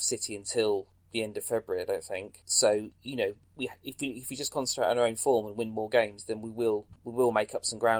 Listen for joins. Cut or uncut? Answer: uncut